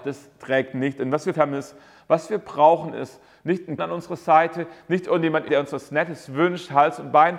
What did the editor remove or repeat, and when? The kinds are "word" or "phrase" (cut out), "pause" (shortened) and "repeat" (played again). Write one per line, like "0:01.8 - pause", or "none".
0:01.3 - word
0:03.8 - word
0:05.5 - word